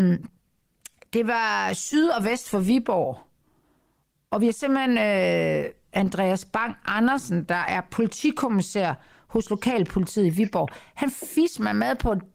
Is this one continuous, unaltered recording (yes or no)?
yes